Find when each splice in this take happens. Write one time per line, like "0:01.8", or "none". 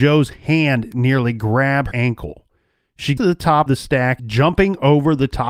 0:01.9
0:03.2
0:03.7
0:04.2